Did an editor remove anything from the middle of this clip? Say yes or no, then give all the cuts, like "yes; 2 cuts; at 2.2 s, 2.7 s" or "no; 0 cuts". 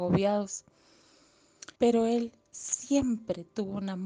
yes; 1 cut; at 1.8 s